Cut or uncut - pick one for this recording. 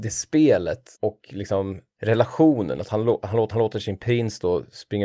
cut